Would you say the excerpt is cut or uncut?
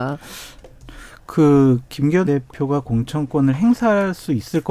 cut